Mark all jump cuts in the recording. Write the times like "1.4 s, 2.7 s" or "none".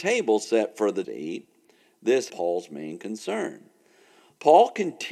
1.0 s, 2.3 s